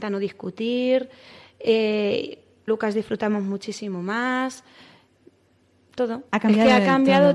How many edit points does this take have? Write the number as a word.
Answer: two